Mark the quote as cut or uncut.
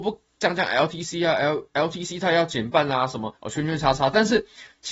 cut